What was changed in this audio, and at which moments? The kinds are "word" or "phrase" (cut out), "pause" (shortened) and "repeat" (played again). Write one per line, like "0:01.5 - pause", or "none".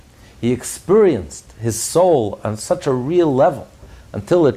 none